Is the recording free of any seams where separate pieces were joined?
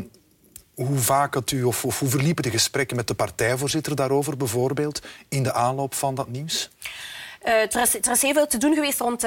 yes; 0 cuts

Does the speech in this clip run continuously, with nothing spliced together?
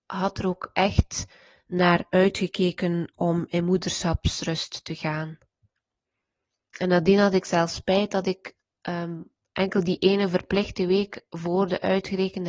yes; 0 cuts

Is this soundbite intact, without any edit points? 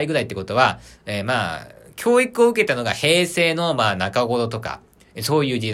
yes; 0 cuts

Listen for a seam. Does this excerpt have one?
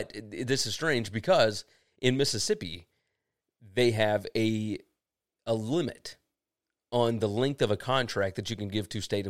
no; 0 cuts

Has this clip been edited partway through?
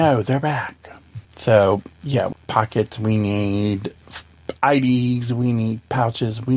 yes; 2 cuts; at 1.2 s, 2.3 s

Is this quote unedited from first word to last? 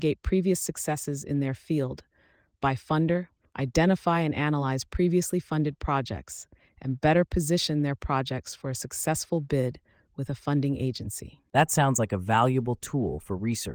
yes; 0 cuts

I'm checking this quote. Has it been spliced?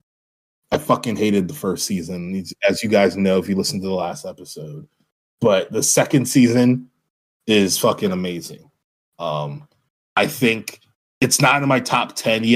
no; 0 cuts

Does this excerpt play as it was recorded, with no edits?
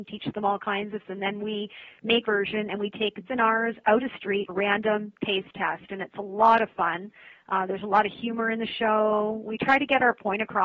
no; 5 cuts; at 1.0 s, 2.2 s, 3.3 s, 4.0 s, 4.5 s

